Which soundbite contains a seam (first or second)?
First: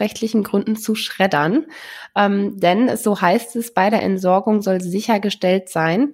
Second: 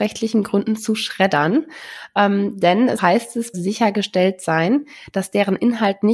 second